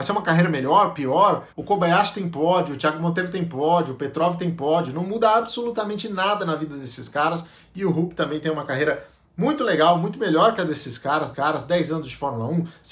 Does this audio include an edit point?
yes; 2 cuts; at 1.5 s, 11.3 s

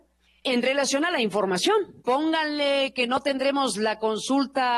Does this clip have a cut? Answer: yes; 1 cut; at 2.0 s

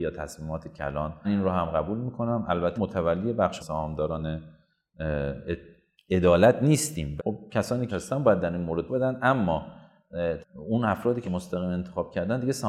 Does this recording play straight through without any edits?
no; 8 cuts; at 1.2 s, 2.8 s, 3.6 s, 7.2 s, 7.9 s, 8.9 s, 10.4 s, 11.2 s

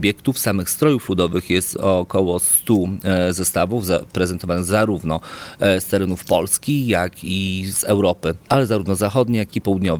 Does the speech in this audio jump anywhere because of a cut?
no; 0 cuts

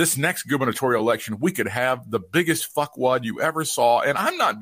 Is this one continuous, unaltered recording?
yes; 0 cuts

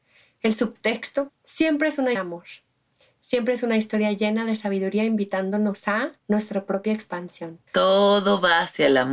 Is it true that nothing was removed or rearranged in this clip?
no; 4 cuts; at 1.3 s, 2.2 s, 6.2 s, 7.7 s

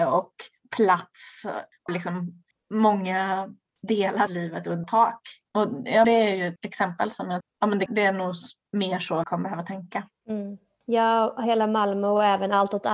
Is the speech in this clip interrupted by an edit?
yes; 8 cuts; at 1.9 s, 4.3 s, 4.8 s, 6.0 s, 6.6 s, 7.4 s, 7.9 s, 9.2 s

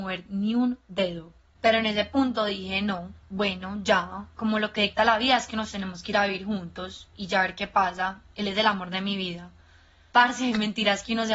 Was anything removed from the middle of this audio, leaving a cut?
no; 0 cuts

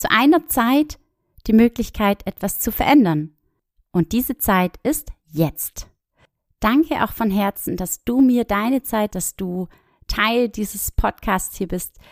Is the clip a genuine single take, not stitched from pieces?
no; 1 cut; at 9.1 s

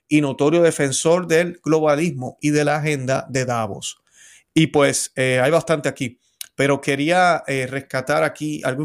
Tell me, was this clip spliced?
no; 0 cuts

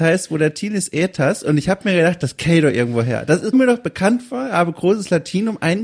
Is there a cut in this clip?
yes; 1 cut; at 3.5 s

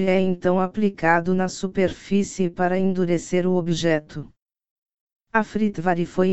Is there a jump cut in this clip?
no; 0 cuts

